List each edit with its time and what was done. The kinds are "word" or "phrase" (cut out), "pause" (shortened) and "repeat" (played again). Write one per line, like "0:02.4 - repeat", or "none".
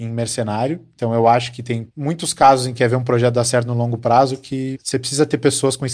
0:02.7 - phrase